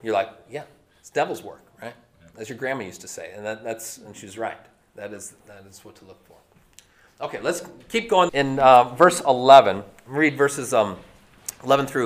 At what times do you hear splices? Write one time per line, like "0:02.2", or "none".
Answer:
0:08.3